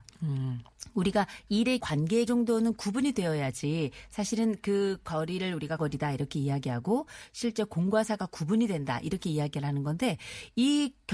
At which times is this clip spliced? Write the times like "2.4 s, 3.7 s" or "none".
1.8 s, 2.3 s, 5.8 s